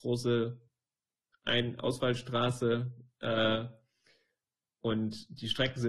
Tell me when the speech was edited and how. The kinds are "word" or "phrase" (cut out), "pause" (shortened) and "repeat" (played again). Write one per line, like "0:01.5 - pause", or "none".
none